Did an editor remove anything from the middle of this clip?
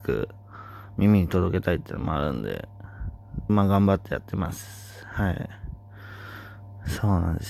yes; 1 cut; at 3.5 s

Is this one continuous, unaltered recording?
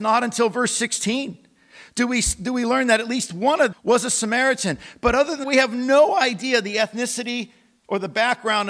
no; 2 cuts; at 3.7 s, 5.4 s

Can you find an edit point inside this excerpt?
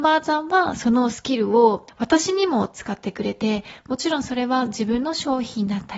yes; 1 cut; at 1.9 s

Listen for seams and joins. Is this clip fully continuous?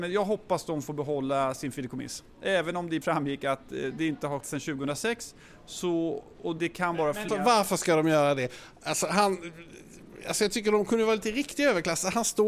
no; 4 cuts; at 3.0 s, 4.4 s, 6.6 s, 7.3 s

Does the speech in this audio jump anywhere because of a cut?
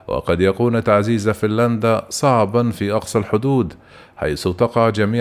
no; 0 cuts

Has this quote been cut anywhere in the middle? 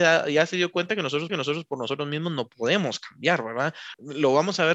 yes; 1 cut; at 1.3 s

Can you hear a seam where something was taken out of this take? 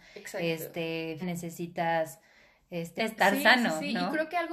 yes; 2 cuts; at 1.2 s, 3.0 s

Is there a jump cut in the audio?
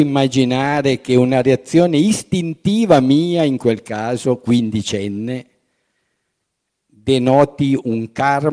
no; 0 cuts

